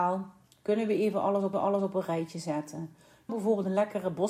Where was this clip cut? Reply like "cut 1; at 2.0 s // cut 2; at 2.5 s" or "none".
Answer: cut 1; at 1.5 s // cut 2; at 3.3 s